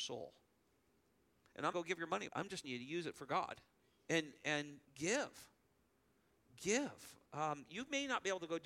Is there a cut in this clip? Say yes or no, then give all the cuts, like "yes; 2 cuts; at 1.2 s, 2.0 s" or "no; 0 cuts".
yes; 6 cuts; at 1.7 s, 2.3 s, 2.6 s, 3.8 s, 4.8 s, 7.3 s